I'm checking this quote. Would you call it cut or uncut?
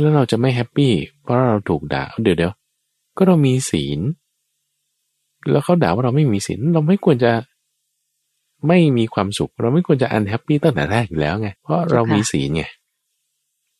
cut